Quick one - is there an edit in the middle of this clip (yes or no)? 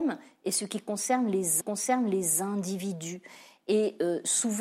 yes